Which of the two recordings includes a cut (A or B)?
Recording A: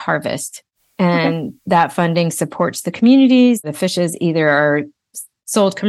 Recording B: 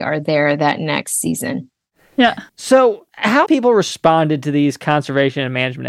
B